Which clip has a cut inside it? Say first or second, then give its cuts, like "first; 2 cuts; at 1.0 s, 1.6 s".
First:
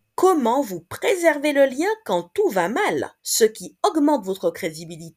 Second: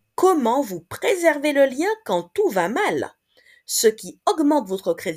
first; 1 cut; at 3.2 s